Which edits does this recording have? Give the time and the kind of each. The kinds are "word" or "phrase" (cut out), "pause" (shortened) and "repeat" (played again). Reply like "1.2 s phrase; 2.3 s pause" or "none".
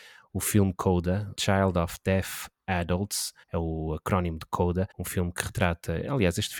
1.3 s word; 3.4 s pause; 4.9 s pause